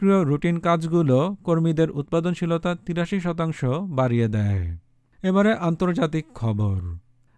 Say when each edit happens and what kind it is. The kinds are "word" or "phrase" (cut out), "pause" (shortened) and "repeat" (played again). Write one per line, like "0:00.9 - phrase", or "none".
none